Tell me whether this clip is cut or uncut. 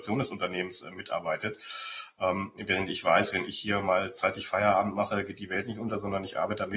uncut